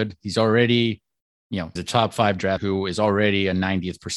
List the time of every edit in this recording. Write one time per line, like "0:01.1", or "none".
0:01.8
0:02.6